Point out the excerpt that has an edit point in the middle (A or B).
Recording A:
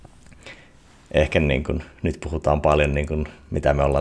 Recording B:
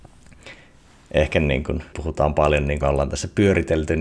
B